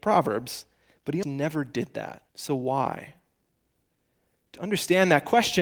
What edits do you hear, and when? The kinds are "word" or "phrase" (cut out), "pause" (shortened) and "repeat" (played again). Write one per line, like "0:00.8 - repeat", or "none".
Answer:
0:01.2 - word
0:02.3 - pause

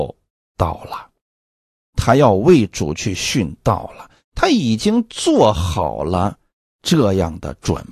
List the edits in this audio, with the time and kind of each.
none

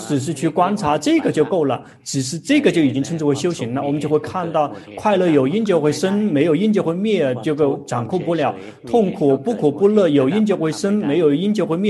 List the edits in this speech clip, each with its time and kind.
none

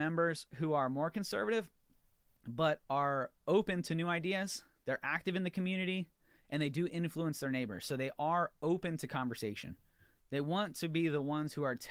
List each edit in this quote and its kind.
none

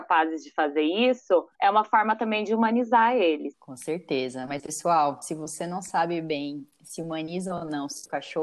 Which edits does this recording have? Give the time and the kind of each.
0:01.5 - pause

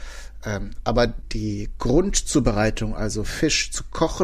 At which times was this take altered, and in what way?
none

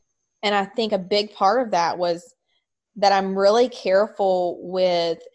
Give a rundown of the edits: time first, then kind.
none

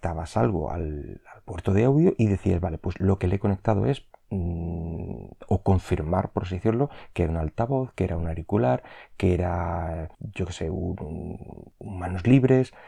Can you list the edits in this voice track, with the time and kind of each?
0:10.1 - pause

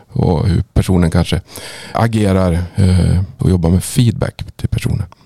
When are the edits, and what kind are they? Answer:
0:01.9 - word
0:03.4 - word

